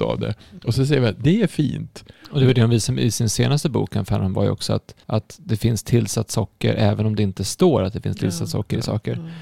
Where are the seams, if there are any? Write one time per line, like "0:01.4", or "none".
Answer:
0:05.0